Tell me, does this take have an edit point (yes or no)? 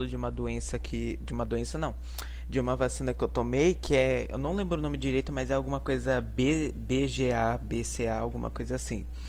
no